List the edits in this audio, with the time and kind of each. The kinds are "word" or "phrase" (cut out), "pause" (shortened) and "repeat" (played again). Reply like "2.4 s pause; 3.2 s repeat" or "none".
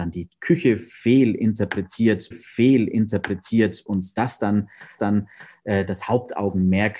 2.3 s repeat; 5.0 s repeat